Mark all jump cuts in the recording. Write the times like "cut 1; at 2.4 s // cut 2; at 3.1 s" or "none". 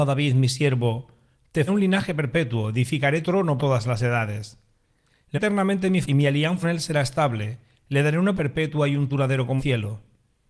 cut 1; at 1.7 s // cut 2; at 3.2 s // cut 3; at 3.6 s // cut 4; at 5.3 s // cut 5; at 6.0 s // cut 6; at 6.6 s // cut 7; at 8.4 s // cut 8; at 9.1 s // cut 9; at 9.6 s